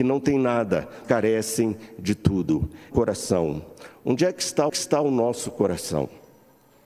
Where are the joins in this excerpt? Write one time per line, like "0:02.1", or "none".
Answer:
0:01.0
0:02.9
0:04.7